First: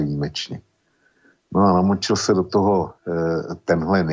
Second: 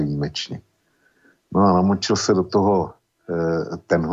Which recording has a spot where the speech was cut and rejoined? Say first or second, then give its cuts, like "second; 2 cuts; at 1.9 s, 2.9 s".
first; 1 cut; at 3.0 s